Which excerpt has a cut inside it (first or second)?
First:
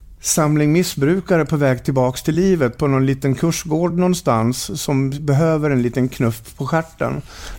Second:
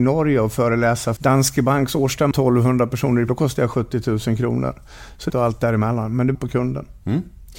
second